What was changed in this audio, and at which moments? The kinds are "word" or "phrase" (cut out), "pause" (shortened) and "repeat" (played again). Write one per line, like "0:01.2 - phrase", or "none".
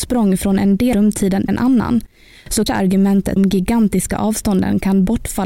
0:00.9 - word
0:01.5 - word
0:02.7 - word
0:03.4 - phrase